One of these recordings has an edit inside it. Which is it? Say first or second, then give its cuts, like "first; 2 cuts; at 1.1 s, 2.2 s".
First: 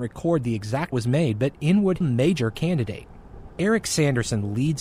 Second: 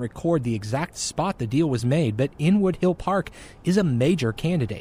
first; 2 cuts; at 0.9 s, 2.0 s